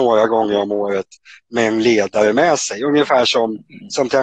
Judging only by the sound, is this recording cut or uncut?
uncut